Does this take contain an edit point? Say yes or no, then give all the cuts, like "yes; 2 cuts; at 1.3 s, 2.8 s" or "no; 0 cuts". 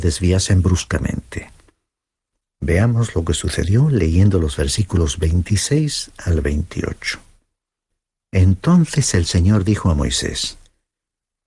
no; 0 cuts